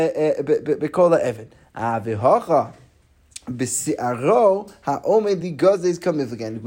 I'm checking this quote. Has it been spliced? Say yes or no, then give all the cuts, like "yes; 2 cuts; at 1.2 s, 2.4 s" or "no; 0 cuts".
no; 0 cuts